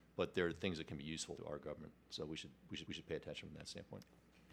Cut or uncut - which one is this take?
cut